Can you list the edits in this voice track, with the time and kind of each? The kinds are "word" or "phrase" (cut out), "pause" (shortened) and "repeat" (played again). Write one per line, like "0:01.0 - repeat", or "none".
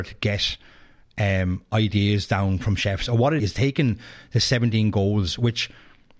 0:03.4 - phrase